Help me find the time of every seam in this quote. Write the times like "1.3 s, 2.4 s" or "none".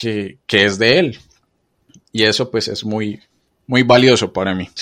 none